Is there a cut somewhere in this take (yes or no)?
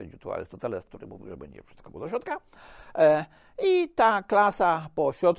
yes